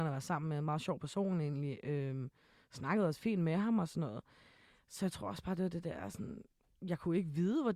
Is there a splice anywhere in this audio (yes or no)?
no